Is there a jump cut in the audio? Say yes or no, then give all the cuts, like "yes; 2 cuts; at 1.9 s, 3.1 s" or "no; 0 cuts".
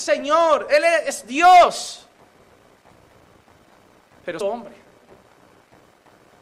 yes; 1 cut; at 4.4 s